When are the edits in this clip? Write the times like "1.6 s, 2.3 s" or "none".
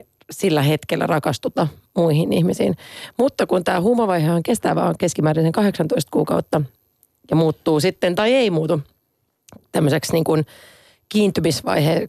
none